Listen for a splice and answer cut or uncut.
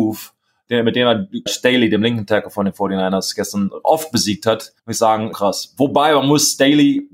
cut